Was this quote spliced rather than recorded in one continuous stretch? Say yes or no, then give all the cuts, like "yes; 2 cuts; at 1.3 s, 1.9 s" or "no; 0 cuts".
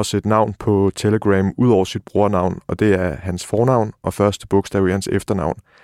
no; 0 cuts